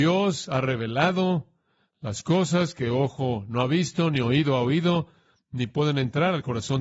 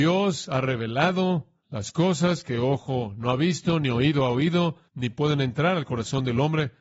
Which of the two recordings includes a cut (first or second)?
second